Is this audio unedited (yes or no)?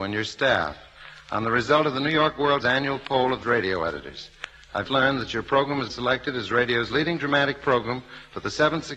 no